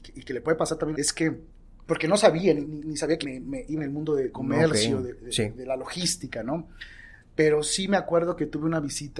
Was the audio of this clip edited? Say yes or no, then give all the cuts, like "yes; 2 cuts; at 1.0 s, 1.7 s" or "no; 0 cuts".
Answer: yes; 5 cuts; at 0.9 s, 2.6 s, 3.2 s, 3.8 s, 4.3 s